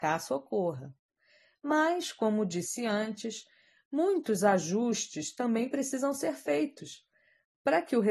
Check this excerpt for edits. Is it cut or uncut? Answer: uncut